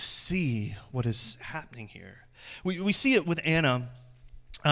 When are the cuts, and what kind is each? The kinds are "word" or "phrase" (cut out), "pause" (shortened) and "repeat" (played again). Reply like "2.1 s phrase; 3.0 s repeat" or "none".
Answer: 3.2 s word